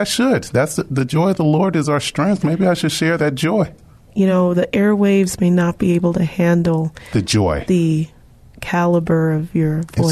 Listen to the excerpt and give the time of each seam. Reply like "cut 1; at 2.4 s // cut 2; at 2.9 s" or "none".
none